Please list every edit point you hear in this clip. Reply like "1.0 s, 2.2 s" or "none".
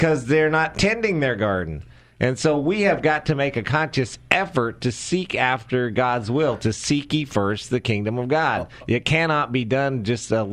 none